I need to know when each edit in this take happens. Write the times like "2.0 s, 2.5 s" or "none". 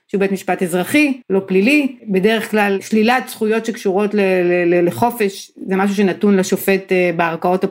1.2 s, 2.0 s